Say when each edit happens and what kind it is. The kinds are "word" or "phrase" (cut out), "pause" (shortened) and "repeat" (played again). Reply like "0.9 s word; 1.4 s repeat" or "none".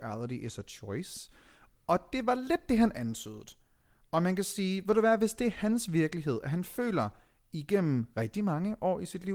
none